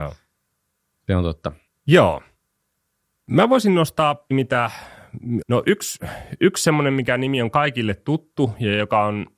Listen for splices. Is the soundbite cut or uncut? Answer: cut